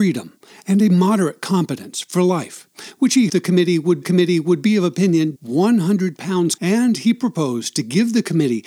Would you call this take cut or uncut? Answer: cut